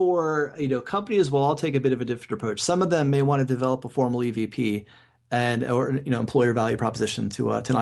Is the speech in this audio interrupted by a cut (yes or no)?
no